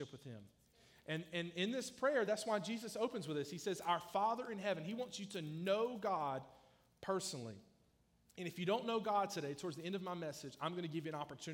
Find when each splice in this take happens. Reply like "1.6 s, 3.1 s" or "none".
none